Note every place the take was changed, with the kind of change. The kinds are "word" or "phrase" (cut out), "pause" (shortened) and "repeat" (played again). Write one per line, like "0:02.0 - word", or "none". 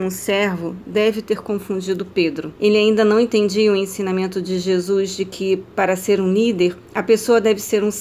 0:02.6 - pause
0:06.9 - pause